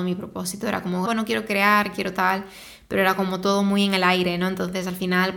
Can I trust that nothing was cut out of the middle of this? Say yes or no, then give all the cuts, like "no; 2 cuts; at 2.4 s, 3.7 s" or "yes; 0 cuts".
no; 1 cut; at 1.1 s